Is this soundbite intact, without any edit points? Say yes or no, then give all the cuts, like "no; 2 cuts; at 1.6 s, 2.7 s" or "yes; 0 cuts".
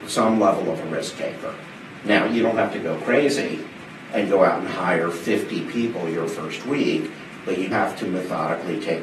no; 1 cut; at 7.7 s